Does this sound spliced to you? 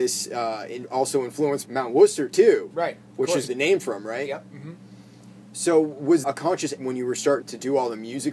yes; 5 cuts; at 1.6 s, 3.5 s, 6.2 s, 6.8 s, 7.4 s

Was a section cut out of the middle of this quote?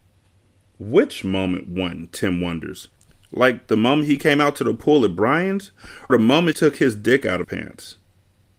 yes; 3 cuts; at 6.1 s, 6.5 s, 7.4 s

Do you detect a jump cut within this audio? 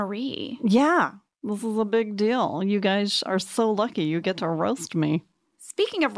no; 0 cuts

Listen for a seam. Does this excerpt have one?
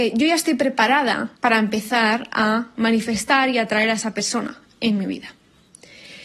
yes; 1 cut; at 1.4 s

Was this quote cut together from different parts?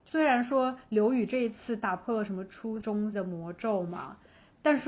yes; 2 cuts; at 2.8 s, 3.1 s

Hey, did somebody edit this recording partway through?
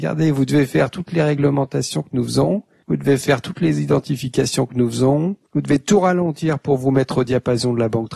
yes; 1 cut; at 5.4 s

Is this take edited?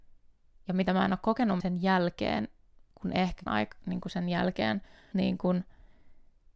yes; 3 cuts; at 1.6 s, 3.5 s, 5.1 s

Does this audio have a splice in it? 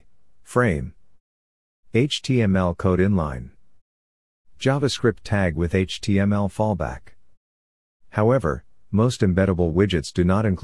no; 0 cuts

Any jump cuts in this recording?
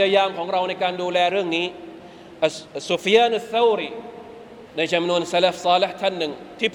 yes; 1 cut; at 4.7 s

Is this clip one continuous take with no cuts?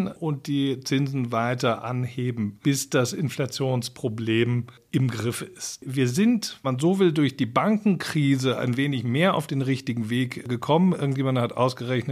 no; 2 cuts; at 2.6 s, 6.6 s

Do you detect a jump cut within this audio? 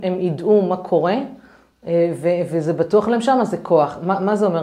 no; 0 cuts

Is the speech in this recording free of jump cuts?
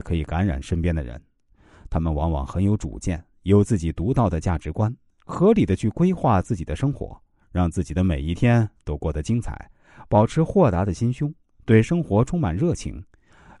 yes; 0 cuts

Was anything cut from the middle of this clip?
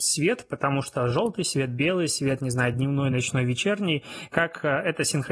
no; 0 cuts

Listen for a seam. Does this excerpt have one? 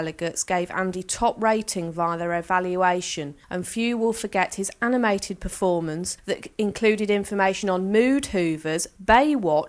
no; 0 cuts

